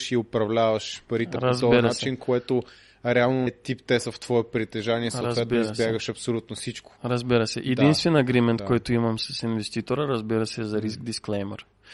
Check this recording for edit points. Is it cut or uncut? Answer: cut